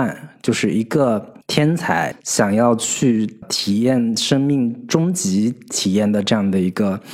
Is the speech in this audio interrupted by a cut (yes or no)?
yes